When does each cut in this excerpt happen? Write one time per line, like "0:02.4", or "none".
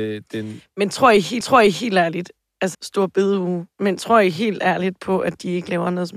0:01.4
0:02.7